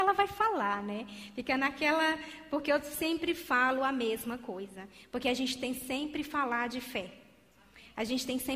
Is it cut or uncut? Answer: uncut